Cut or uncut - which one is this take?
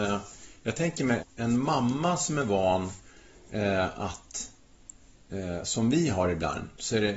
cut